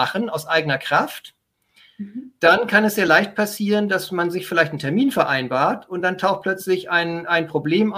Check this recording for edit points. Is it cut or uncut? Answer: uncut